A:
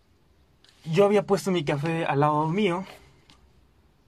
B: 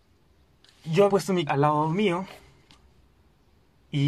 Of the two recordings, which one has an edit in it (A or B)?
B